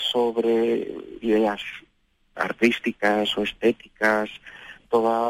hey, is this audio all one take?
no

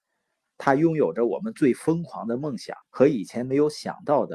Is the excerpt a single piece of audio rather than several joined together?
no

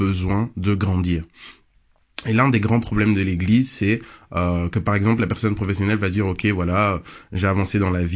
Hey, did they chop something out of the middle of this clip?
no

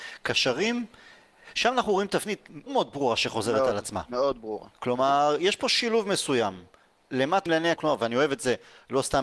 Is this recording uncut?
no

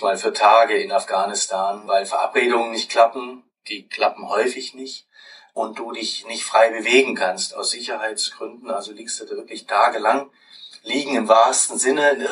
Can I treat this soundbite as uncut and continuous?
yes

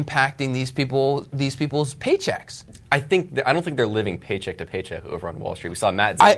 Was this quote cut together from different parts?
no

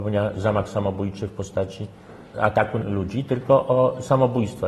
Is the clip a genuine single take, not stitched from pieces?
no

